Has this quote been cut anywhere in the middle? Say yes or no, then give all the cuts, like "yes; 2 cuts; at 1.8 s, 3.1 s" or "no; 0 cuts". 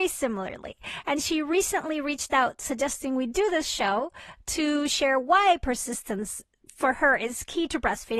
no; 0 cuts